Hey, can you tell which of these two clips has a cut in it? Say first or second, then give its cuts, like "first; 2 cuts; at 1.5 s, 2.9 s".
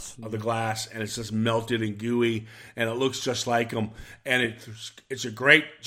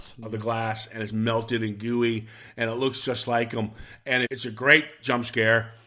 second; 2 cuts; at 1.1 s, 4.3 s